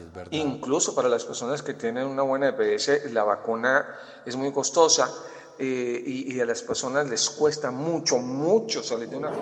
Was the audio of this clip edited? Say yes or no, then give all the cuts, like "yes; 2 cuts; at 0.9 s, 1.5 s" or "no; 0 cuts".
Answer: no; 0 cuts